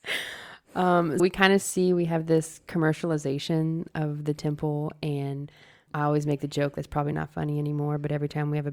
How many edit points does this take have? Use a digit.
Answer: 2